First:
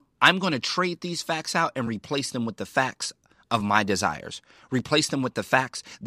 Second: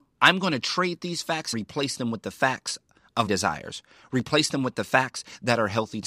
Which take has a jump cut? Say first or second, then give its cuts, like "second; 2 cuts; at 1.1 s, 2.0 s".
second; 2 cuts; at 1.5 s, 3.3 s